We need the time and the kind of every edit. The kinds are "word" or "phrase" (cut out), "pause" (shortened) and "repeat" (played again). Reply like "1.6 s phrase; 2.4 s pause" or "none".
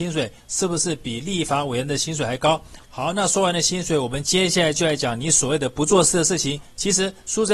2.8 s pause